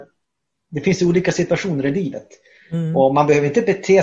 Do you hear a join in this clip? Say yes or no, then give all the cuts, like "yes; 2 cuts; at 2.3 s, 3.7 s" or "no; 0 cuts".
no; 0 cuts